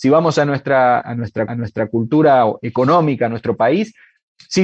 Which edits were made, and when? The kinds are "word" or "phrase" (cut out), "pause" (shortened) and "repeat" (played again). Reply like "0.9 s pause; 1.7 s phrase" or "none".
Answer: 1.0 s word; 1.5 s repeat